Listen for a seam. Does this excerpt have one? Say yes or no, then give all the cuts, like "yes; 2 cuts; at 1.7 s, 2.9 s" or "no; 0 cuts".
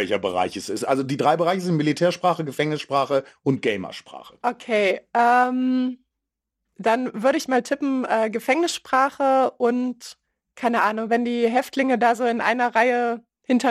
no; 0 cuts